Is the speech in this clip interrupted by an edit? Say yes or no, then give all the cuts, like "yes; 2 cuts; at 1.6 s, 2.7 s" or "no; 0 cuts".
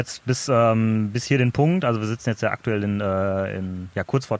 no; 0 cuts